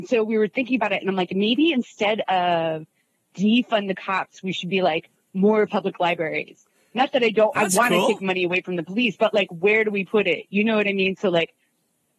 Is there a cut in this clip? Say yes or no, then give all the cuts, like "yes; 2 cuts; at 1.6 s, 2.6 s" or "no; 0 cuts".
no; 0 cuts